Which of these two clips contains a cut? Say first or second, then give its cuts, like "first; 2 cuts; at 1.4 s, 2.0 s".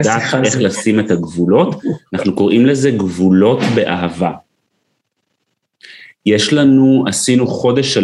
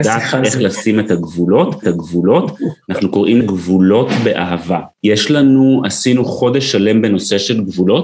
second; 3 cuts; at 1.8 s, 3.4 s, 4.9 s